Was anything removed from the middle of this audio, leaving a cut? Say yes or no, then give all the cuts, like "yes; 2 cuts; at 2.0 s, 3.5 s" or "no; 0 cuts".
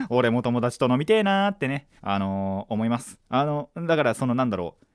yes; 2 cuts; at 2.0 s, 3.2 s